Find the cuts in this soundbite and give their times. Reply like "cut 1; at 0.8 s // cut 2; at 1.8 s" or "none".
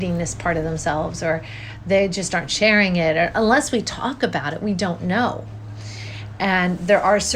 none